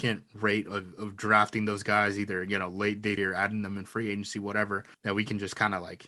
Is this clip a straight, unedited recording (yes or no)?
no